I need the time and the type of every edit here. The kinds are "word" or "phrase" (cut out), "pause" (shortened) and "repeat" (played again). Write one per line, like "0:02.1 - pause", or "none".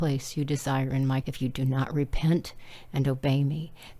0:01.2 - word